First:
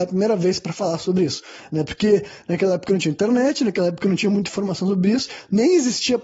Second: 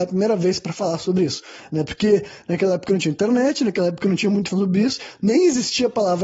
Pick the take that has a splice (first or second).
second